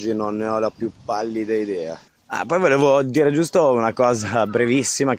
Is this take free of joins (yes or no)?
yes